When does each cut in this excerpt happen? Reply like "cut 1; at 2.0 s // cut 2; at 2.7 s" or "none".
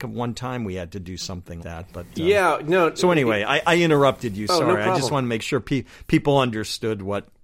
cut 1; at 1.6 s